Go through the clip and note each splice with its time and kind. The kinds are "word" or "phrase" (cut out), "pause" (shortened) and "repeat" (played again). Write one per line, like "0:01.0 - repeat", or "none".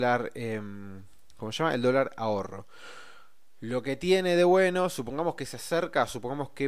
none